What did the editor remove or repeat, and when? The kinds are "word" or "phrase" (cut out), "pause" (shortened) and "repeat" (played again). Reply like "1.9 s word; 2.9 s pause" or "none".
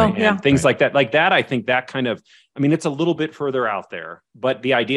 none